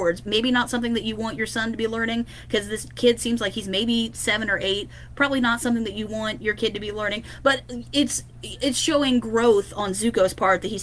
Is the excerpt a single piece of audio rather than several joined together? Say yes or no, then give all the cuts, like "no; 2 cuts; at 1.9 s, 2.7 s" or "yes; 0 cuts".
yes; 0 cuts